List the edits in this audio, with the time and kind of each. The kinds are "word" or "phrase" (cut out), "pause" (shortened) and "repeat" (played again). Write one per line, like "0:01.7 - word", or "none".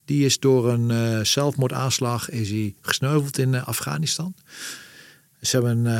none